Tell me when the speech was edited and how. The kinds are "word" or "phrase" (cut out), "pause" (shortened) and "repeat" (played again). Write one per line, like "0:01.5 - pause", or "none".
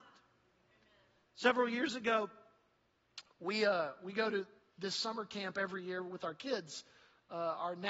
none